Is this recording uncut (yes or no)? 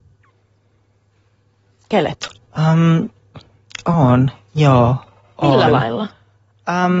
yes